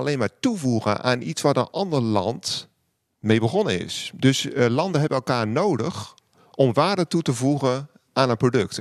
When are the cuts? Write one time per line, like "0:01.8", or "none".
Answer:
none